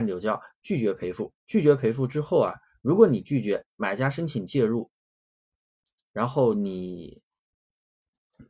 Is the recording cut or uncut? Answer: cut